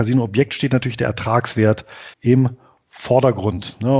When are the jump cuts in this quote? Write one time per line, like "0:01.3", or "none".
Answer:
0:02.1